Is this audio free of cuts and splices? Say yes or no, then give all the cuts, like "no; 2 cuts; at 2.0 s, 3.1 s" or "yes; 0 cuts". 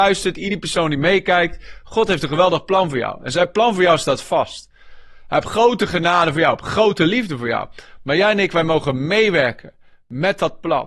yes; 0 cuts